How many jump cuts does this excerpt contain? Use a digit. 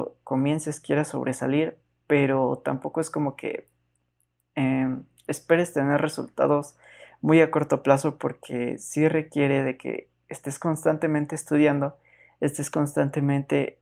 0